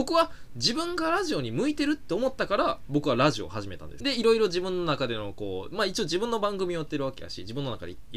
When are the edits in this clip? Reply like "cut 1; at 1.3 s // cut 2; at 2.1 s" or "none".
cut 1; at 4.0 s